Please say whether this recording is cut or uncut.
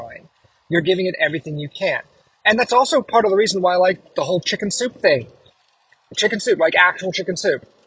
uncut